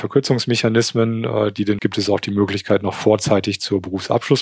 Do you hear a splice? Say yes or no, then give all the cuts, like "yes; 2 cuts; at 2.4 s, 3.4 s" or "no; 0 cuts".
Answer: yes; 1 cut; at 1.8 s